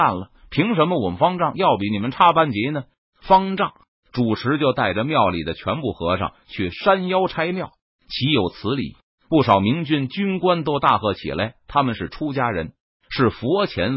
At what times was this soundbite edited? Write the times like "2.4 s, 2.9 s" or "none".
none

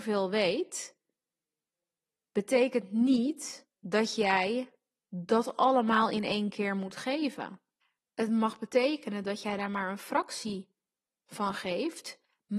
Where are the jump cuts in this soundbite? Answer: 3.8 s, 7.8 s

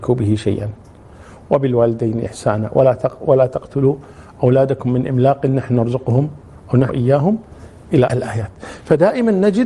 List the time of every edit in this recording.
6.9 s, 8.1 s

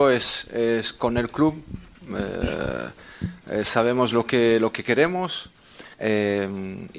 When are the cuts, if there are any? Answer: 5.9 s

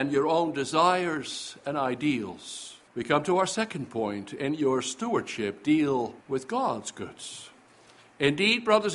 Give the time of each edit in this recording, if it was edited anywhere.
2.9 s, 6.2 s

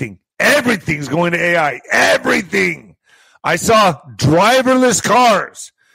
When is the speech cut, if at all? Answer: none

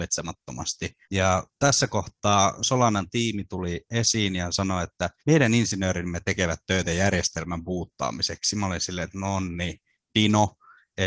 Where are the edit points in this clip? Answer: 1.0 s, 5.2 s

